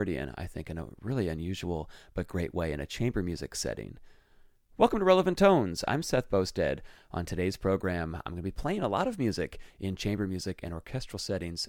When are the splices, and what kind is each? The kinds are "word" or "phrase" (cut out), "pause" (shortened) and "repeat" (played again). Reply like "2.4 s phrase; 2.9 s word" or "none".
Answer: none